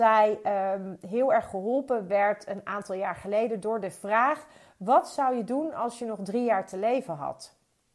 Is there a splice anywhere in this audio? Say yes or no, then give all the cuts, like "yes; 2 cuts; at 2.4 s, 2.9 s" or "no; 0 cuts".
no; 0 cuts